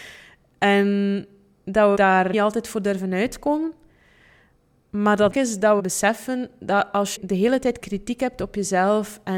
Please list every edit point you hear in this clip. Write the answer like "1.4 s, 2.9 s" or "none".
1.9 s, 2.3 s, 5.3 s, 5.8 s, 7.1 s

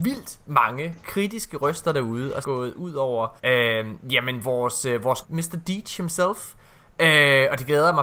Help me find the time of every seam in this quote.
1.0 s, 2.4 s, 3.4 s, 5.2 s

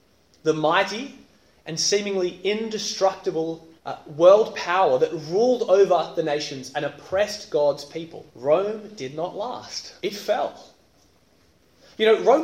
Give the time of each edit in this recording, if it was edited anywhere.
3.8 s, 8.3 s, 10.0 s

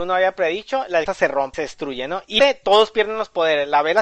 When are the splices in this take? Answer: 1.1 s, 1.5 s, 2.4 s

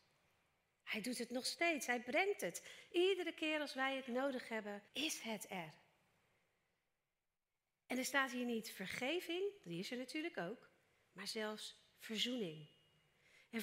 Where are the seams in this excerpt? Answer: 4.9 s

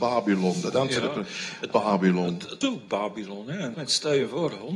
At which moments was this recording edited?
1.7 s, 2.6 s, 3.7 s

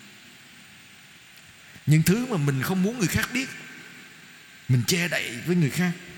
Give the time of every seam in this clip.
none

